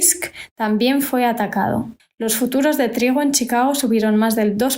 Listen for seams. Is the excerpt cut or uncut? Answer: cut